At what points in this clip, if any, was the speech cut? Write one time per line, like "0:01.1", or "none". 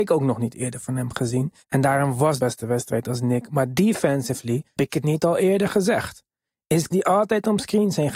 0:01.6
0:02.4
0:04.8
0:06.9

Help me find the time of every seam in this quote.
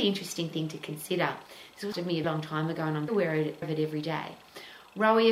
0:01.9
0:02.2
0:03.1
0:03.6

